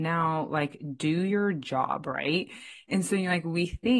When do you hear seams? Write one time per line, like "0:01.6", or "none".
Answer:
none